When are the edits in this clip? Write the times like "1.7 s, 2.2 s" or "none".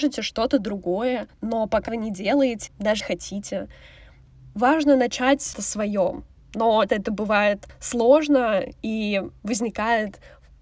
1.3 s, 1.9 s, 2.7 s, 3.0 s, 5.5 s, 6.9 s